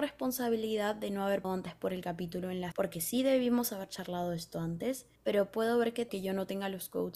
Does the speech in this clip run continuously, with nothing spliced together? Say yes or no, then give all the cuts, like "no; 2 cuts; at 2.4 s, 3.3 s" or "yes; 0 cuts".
no; 4 cuts; at 1.4 s, 2.7 s, 5.2 s, 6.1 s